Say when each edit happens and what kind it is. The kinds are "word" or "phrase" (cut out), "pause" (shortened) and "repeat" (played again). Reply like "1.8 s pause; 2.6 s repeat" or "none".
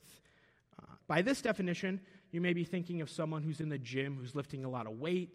1.0 s word